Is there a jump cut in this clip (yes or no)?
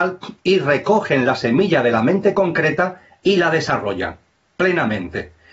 no